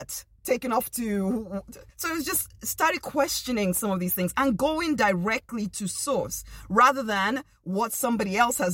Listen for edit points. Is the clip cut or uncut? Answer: cut